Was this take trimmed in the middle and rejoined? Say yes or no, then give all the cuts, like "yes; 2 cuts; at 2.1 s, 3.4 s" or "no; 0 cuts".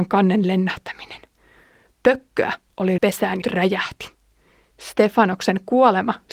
yes; 2 cuts; at 3.0 s, 3.4 s